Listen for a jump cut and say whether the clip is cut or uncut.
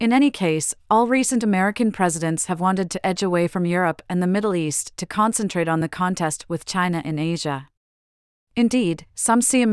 uncut